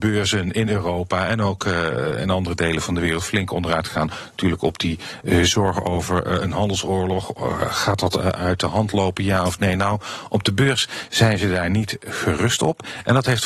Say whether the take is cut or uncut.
uncut